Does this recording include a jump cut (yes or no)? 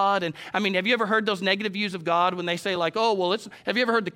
no